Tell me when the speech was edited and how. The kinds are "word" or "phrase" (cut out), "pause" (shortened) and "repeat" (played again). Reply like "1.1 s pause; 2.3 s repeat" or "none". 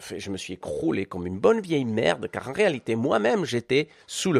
none